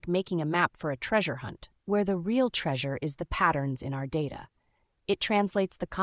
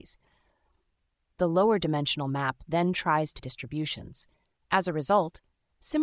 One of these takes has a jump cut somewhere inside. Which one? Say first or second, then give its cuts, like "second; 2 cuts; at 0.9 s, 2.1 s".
second; 1 cut; at 3.4 s